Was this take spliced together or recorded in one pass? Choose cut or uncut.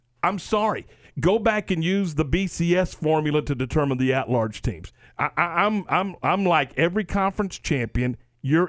uncut